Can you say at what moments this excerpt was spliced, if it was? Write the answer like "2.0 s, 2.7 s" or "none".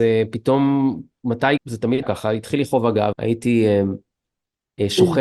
1.6 s, 2.0 s, 3.1 s